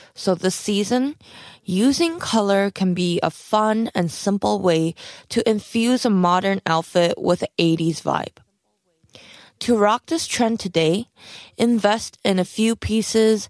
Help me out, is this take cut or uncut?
uncut